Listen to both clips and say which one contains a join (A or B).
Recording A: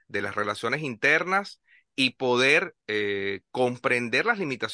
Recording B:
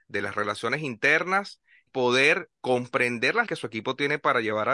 B